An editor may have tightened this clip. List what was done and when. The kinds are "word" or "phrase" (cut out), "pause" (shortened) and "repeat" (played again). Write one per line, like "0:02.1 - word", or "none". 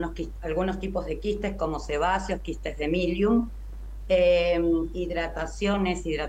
none